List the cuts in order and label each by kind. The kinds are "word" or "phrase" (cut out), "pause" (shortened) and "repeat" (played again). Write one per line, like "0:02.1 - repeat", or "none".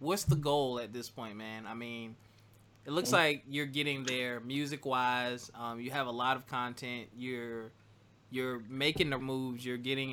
0:09.2 - word